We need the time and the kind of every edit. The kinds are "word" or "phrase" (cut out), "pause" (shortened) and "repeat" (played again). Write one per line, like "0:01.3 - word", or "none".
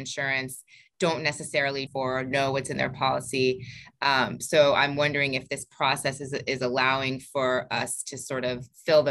0:01.9 - phrase